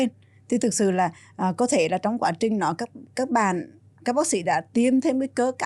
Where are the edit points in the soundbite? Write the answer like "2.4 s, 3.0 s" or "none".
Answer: none